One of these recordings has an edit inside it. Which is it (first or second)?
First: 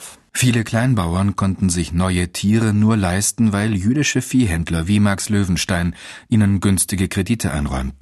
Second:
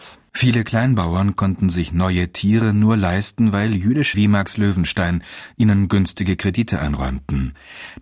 second